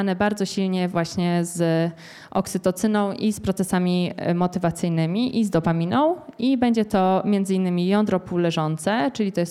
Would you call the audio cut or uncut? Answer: uncut